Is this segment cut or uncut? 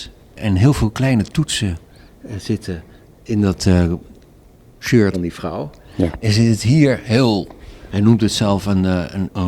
cut